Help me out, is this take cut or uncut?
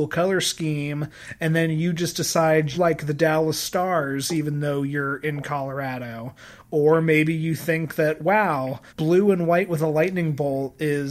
cut